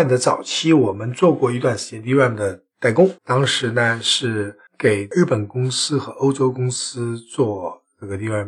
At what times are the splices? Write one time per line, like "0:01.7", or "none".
0:03.2
0:04.7